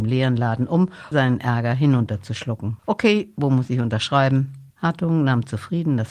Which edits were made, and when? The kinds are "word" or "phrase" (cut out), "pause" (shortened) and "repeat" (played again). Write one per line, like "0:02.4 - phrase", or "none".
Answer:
0:01.1 - word
0:02.8 - pause
0:04.7 - pause